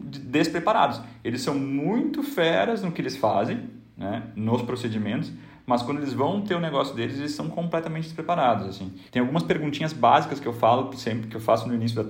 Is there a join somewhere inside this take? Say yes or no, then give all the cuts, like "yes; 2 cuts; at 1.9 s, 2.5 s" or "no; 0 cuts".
yes; 1 cut; at 9.1 s